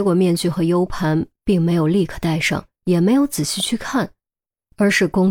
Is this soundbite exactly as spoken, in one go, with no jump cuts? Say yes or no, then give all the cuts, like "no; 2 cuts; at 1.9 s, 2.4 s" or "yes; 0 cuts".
no; 1 cut; at 2.8 s